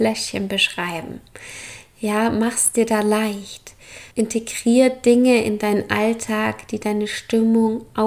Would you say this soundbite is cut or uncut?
cut